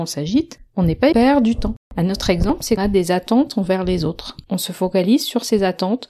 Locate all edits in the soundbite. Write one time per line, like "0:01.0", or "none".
0:01.1
0:02.8